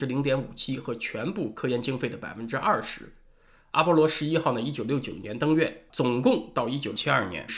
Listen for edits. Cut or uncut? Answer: cut